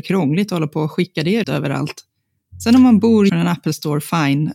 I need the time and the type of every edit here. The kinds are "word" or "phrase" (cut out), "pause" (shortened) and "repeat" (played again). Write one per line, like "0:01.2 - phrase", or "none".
0:01.4 - word
0:03.3 - word